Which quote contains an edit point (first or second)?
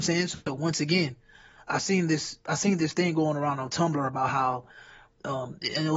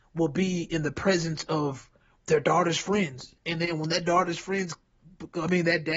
second